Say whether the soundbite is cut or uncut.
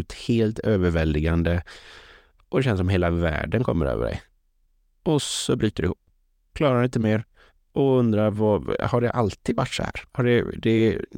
uncut